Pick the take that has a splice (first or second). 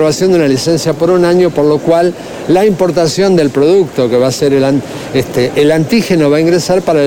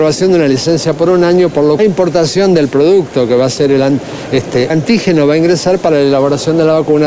second